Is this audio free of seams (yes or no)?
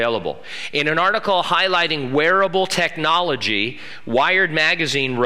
yes